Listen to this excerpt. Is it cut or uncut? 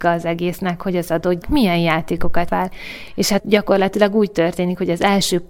cut